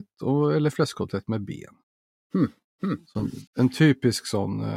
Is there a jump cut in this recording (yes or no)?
yes